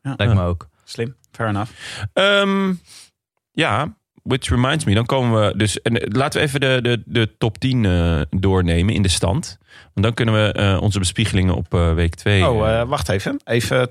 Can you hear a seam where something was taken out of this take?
no; 0 cuts

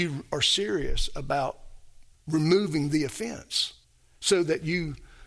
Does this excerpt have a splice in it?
yes; 2 cuts; at 2.1 s, 3.8 s

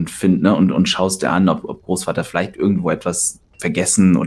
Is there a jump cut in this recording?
no; 0 cuts

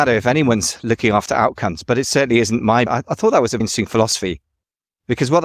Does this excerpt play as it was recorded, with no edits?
no; 2 cuts; at 2.9 s, 3.6 s

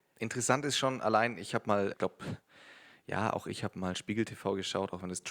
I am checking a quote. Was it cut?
yes; 1 cut; at 1.9 s

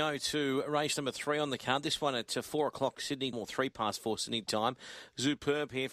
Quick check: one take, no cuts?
no; 1 cut; at 3.3 s

